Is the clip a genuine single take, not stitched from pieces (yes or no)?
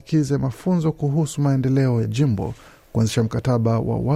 no